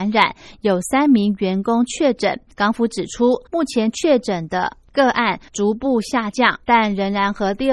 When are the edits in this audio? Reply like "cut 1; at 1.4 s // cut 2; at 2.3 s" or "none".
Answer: cut 1; at 2.5 s // cut 2; at 3.5 s // cut 3; at 6.6 s